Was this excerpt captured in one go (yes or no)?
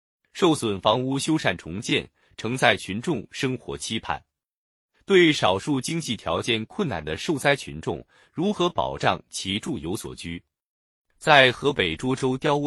yes